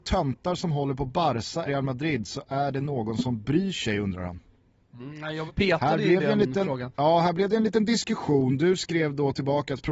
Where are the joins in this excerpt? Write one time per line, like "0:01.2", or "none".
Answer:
0:01.7
0:05.5
0:06.9